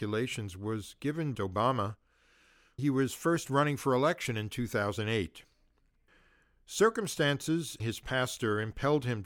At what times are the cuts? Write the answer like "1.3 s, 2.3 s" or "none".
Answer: 1.3 s, 2.8 s, 7.8 s